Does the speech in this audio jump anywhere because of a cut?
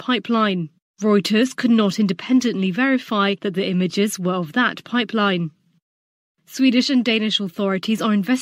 no; 0 cuts

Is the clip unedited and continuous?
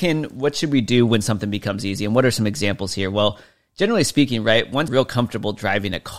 no; 1 cut; at 4.9 s

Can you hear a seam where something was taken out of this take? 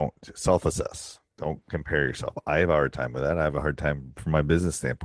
yes; 1 cut; at 4.2 s

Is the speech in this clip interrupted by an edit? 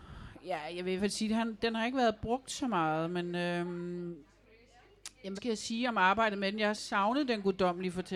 yes; 3 cuts; at 1.0 s, 5.4 s, 6.8 s

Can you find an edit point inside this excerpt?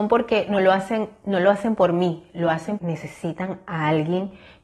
yes; 1 cut; at 2.8 s

